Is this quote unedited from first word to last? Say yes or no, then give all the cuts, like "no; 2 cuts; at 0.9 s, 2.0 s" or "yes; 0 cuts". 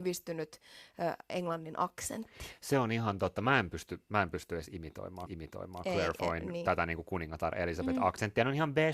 no; 1 cut; at 5.3 s